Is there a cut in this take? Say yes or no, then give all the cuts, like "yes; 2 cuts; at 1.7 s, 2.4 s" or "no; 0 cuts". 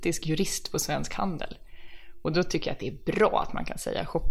no; 0 cuts